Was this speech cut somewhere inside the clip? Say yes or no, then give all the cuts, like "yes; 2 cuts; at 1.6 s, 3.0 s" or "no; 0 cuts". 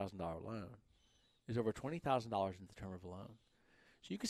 yes; 1 cut; at 2.7 s